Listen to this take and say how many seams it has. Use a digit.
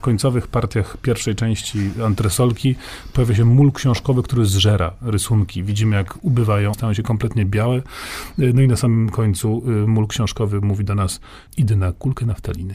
2